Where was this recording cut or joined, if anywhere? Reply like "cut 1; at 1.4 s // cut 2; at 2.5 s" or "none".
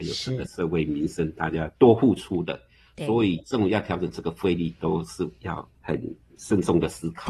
none